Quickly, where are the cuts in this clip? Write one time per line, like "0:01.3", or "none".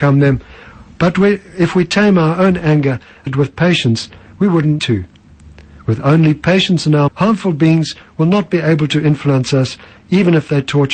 0:03.3
0:04.8
0:07.1

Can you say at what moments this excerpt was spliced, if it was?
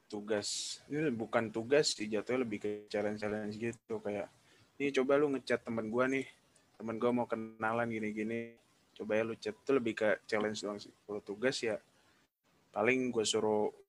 none

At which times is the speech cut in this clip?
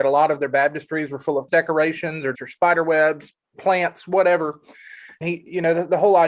0:01.5
0:02.3
0:05.2

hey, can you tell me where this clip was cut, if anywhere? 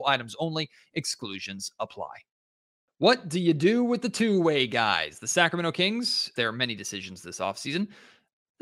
0:02.7
0:06.4

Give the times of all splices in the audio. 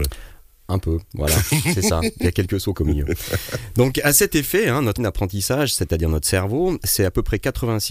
0:02.7
0:05.0

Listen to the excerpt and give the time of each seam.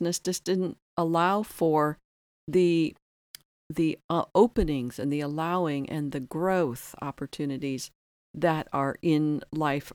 none

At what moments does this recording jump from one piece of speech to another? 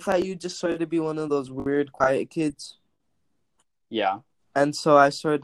none

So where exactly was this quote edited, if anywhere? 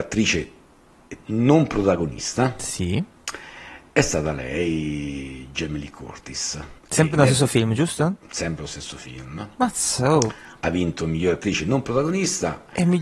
0:06.8

